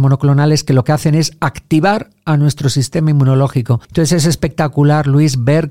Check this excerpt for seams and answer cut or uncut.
cut